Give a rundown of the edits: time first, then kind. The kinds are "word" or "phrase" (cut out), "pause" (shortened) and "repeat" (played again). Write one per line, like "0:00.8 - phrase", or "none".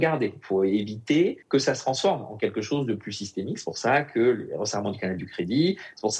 0:01.4 - pause

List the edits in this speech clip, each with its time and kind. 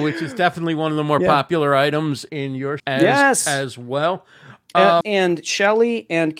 0:02.3 - word
0:02.8 - word
0:05.0 - phrase

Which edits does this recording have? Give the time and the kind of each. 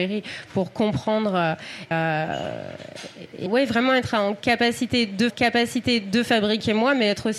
0:01.9 - word
0:03.5 - phrase
0:05.3 - repeat

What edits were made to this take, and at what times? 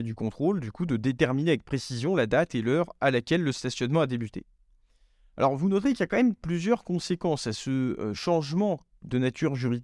none

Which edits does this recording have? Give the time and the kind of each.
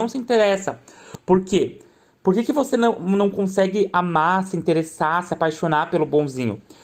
none

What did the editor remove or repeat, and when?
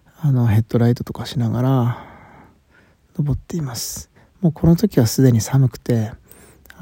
0:04.2 - pause

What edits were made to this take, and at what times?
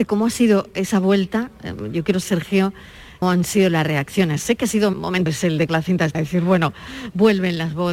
0:02.2 - word
0:03.2 - word
0:04.9 - word
0:05.3 - word
0:05.7 - word
0:06.1 - word

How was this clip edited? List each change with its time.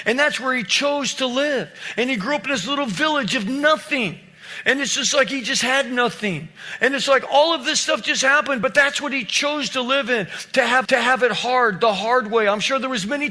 0:10.8 - repeat

